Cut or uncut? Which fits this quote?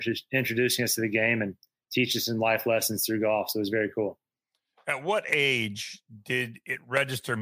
uncut